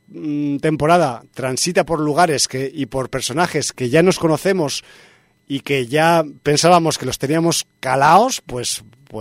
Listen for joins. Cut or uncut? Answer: uncut